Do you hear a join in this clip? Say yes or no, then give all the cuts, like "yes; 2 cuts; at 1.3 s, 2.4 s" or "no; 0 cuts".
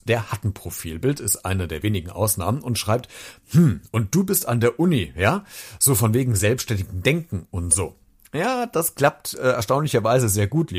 no; 0 cuts